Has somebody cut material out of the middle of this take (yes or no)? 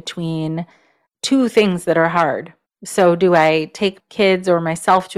yes